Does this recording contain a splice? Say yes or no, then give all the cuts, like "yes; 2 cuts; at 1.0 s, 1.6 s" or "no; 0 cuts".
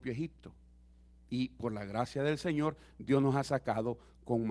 no; 0 cuts